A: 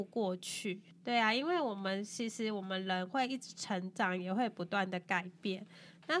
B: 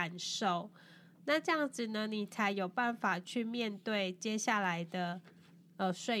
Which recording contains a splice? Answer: A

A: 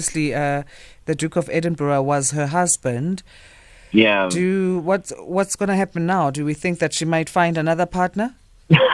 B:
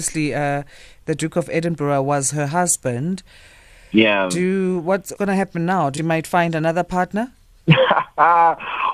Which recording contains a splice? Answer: B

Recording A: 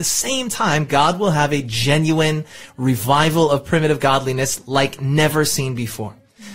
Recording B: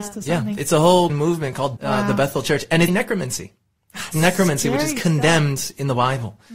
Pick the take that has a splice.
B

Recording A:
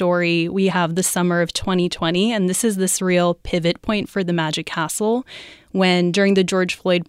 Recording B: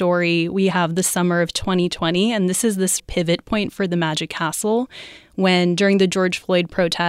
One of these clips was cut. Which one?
B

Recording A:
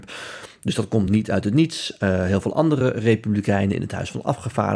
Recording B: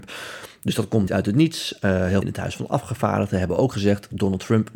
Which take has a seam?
B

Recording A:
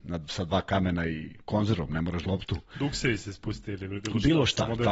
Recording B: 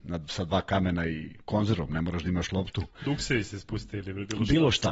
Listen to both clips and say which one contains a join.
A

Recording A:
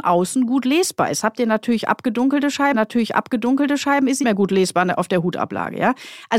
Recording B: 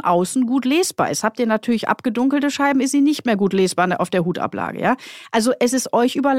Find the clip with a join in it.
A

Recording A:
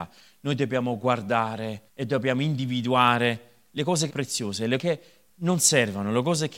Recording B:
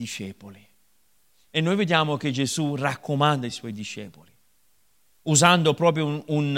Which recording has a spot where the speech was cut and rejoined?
A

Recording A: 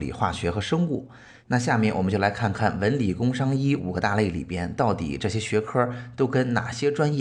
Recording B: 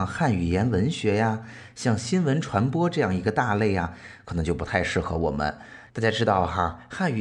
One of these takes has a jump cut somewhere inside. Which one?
B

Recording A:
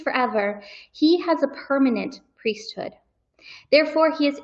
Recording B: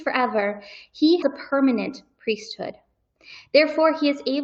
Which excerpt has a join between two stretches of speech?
B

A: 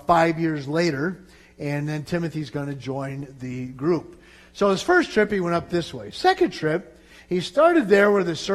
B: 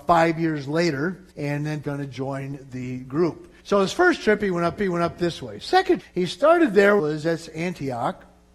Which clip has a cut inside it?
B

